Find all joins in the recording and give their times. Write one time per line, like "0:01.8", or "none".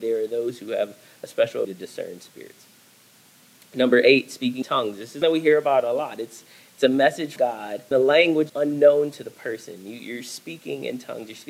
0:01.6
0:04.6
0:05.2
0:07.4
0:07.9
0:08.5

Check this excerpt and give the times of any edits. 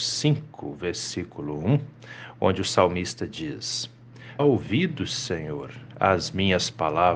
0:04.4

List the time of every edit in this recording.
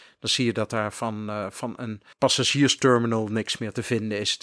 0:02.1

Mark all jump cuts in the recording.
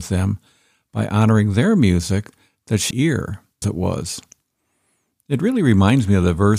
0:02.9
0:03.6

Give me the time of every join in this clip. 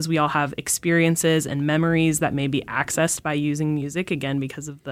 none

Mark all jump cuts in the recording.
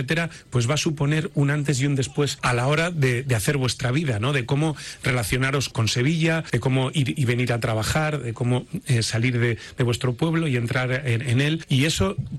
none

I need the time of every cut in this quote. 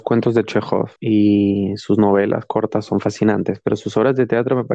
0:01.0

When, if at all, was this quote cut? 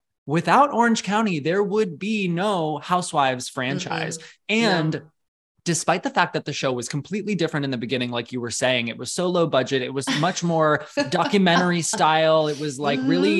none

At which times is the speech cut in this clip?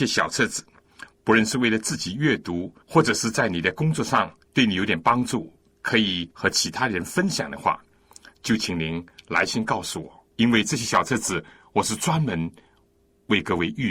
0:02.8
0:04.4
0:06.3
0:10.3

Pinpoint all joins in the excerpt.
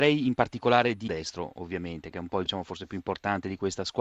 0:01.1
0:02.5

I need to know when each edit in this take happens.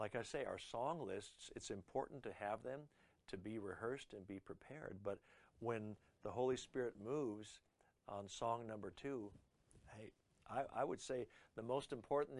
none

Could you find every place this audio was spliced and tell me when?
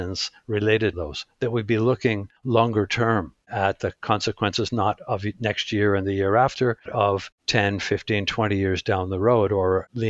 0:00.9
0:02.4
0:06.9

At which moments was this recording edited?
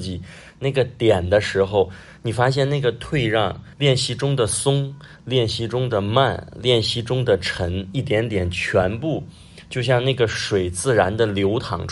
0:03.7

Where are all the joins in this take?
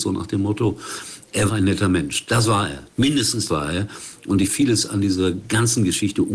0:01.5
0:03.5
0:04.5

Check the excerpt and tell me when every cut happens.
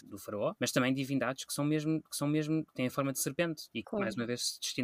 0:02.1
0:03.8

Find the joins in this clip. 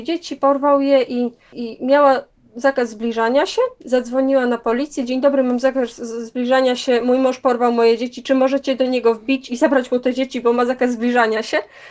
none

